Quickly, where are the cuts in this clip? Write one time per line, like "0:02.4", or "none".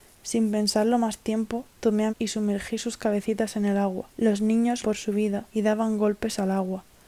0:01.7
0:02.1
0:04.1
0:04.8
0:05.5